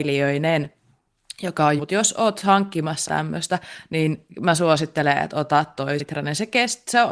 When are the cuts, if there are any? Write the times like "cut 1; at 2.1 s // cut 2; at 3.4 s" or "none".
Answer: cut 1; at 1.8 s // cut 2; at 3.1 s // cut 3; at 6.0 s